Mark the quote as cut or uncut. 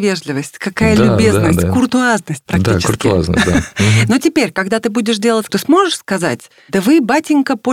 cut